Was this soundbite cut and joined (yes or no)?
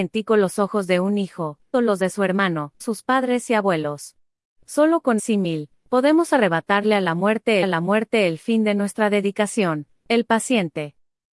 yes